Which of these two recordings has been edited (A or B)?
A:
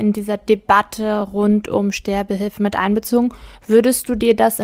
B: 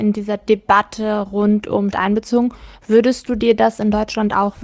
B